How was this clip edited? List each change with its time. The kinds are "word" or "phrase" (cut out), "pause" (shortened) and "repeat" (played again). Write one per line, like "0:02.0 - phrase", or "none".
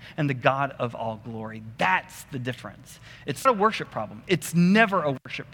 0:03.5 - word